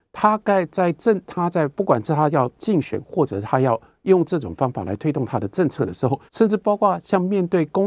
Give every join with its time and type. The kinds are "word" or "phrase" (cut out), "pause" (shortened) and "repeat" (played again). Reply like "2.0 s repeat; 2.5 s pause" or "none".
6.3 s pause